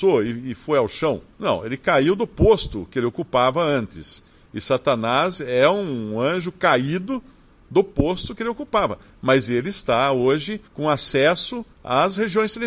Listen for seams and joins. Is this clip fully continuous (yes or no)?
no